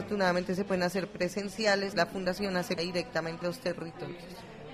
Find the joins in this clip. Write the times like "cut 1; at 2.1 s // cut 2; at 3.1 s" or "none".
cut 1; at 1.9 s // cut 2; at 2.8 s // cut 3; at 3.4 s

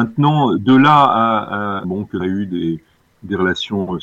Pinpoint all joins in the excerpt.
cut 1; at 1.8 s // cut 2; at 2.2 s

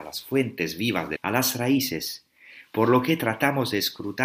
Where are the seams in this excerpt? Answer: cut 1; at 1.2 s

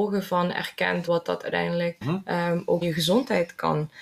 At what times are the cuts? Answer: cut 1; at 1.1 s // cut 2; at 2.0 s // cut 3; at 2.8 s

